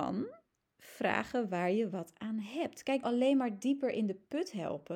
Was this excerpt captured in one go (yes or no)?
no